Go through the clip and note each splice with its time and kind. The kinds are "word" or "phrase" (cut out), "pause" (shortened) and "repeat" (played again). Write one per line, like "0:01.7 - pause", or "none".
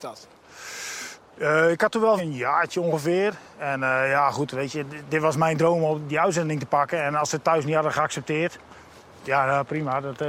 0:02.2 - word